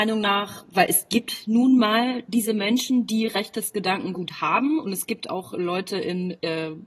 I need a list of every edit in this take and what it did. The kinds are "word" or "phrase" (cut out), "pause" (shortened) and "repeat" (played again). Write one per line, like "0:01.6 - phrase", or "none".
none